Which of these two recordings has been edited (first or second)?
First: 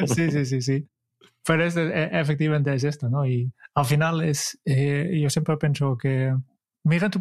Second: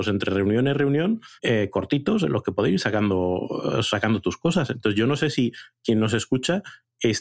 second